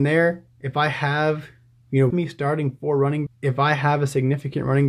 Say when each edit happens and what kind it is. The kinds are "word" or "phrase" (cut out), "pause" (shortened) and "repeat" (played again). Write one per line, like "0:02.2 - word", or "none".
0:02.1 - word
0:03.3 - word